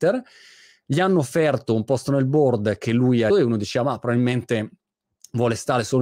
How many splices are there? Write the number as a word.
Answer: one